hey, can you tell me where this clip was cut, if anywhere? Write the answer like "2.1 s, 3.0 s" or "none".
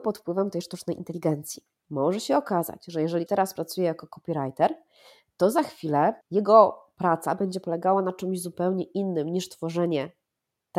3.3 s, 6.2 s